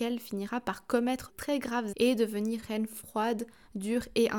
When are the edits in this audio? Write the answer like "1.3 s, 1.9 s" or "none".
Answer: 1.3 s, 1.9 s, 2.6 s